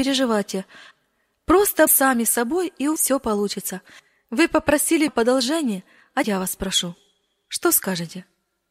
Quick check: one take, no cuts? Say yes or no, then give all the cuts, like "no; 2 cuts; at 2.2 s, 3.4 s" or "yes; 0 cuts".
no; 4 cuts; at 1.9 s, 3.0 s, 5.1 s, 6.2 s